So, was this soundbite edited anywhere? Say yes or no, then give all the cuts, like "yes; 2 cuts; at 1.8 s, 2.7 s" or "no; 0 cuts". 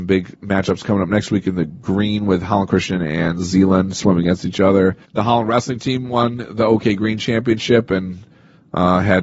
yes; 1 cut; at 5.0 s